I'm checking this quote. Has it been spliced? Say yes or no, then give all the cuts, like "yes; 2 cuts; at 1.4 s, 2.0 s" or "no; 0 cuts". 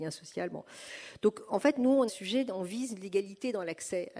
yes; 1 cut; at 2.1 s